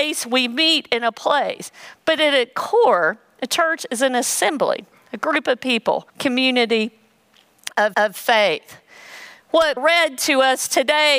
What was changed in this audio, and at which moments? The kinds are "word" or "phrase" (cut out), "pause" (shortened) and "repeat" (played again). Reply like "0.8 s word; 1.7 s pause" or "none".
6.1 s pause; 7.9 s repeat; 9.8 s word